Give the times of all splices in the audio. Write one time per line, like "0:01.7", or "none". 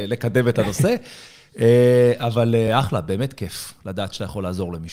none